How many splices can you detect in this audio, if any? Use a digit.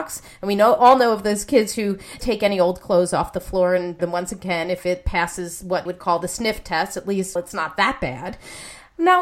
4